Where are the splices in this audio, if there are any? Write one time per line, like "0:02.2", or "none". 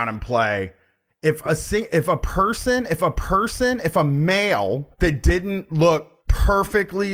0:03.0
0:04.9
0:06.2